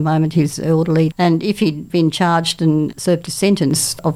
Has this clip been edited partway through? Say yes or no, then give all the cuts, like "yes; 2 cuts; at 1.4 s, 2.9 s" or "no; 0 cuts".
yes; 1 cut; at 1.1 s